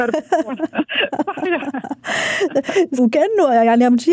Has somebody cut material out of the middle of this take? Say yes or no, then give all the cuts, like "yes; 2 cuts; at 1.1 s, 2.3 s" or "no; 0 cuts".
yes; 1 cut; at 3.0 s